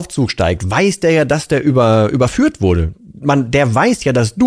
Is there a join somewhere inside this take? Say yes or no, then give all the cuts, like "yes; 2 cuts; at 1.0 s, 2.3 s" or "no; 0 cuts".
no; 0 cuts